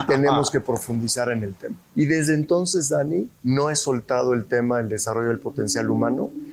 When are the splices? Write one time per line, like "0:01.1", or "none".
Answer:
0:01.8
0:03.3